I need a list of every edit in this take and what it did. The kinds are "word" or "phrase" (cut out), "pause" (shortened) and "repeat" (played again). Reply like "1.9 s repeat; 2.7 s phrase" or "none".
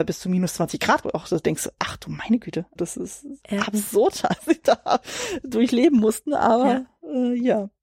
1.0 s word; 2.8 s word; 3.4 s word; 4.4 s word